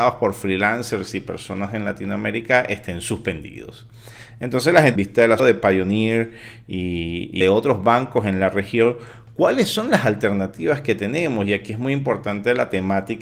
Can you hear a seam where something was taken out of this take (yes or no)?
yes